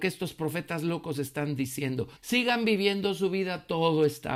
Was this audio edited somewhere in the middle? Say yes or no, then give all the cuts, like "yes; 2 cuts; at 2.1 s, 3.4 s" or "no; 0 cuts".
yes; 1 cut; at 2.2 s